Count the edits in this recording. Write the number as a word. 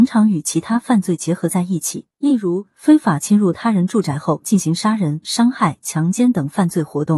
one